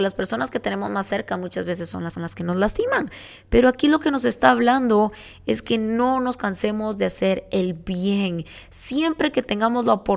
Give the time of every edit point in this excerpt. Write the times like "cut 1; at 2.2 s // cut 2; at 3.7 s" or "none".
cut 1; at 2.2 s

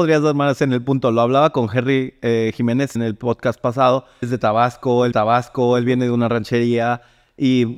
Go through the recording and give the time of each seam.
cut 1; at 2.9 s // cut 2; at 4.2 s // cut 3; at 5.1 s

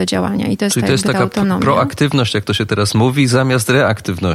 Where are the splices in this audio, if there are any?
none

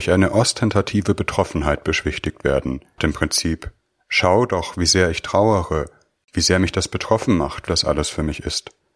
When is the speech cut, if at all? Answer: cut 1; at 3.0 s // cut 2; at 7.7 s

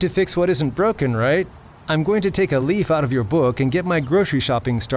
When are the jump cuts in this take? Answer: none

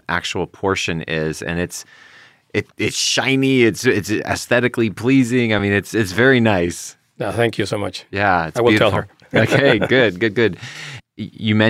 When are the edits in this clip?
none

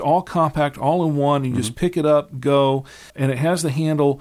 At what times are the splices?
cut 1; at 3.1 s

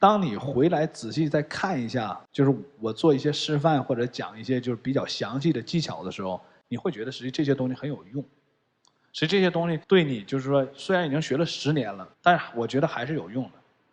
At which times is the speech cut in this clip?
cut 1; at 9.8 s // cut 2; at 12.1 s

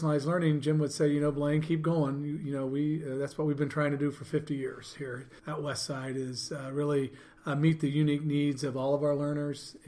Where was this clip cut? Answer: cut 1; at 5.4 s

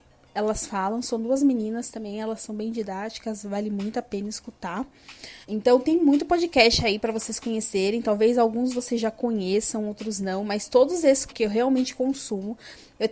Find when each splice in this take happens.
cut 1; at 5.4 s // cut 2; at 11.3 s

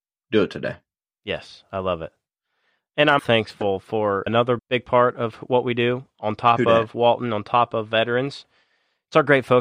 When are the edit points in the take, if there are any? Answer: cut 1; at 3.2 s // cut 2; at 4.3 s // cut 3; at 4.6 s

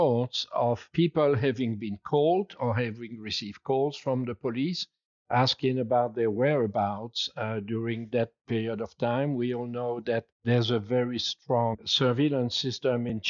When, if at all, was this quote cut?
cut 1; at 10.3 s

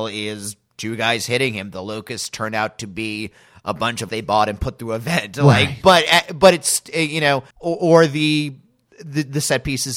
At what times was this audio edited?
cut 1; at 4.1 s // cut 2; at 7.5 s

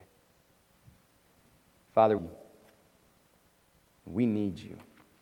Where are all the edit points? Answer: cut 1; at 2.2 s

